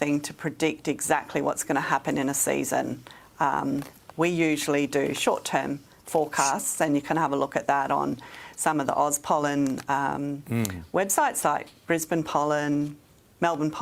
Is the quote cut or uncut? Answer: uncut